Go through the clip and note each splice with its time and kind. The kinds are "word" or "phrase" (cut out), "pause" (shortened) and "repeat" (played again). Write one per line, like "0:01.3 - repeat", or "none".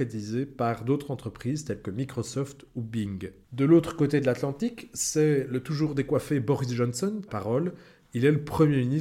0:03.4 - pause
0:07.3 - phrase

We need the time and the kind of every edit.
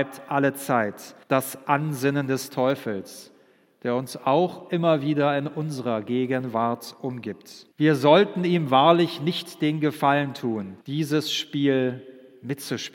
0:01.2 - pause
0:07.7 - pause
0:10.8 - pause

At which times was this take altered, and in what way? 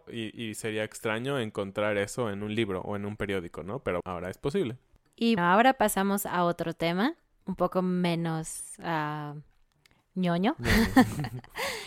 0:04.0 - word
0:05.4 - word

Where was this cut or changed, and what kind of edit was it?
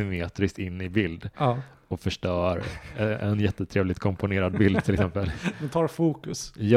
none

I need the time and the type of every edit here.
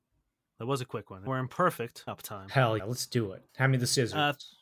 0:01.3 - word
0:02.1 - word
0:02.8 - word
0:03.5 - pause

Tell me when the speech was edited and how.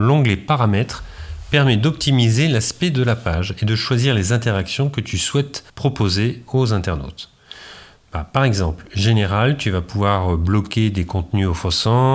0:05.7 - pause

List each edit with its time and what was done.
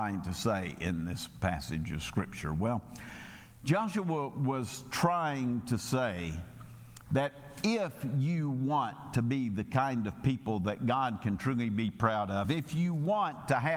none

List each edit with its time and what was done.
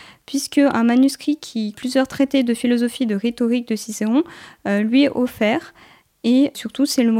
0:01.7 - word

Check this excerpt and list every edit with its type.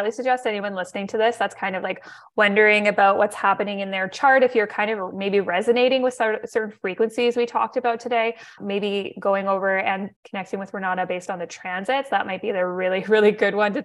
0:08.6 - word
0:10.2 - pause

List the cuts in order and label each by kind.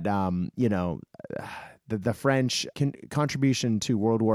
0:02.7 - word

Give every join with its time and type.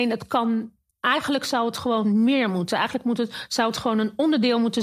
0:00.9 - pause

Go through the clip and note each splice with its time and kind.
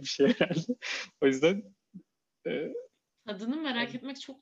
none

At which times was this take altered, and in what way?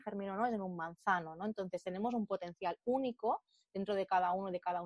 none

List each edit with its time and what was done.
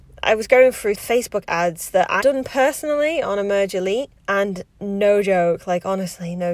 0:00.9 - word
0:02.2 - word
0:04.2 - pause

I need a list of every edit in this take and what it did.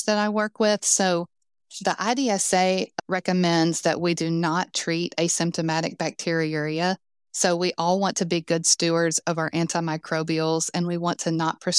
none

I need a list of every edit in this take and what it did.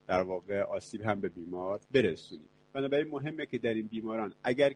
0:01.9 - pause

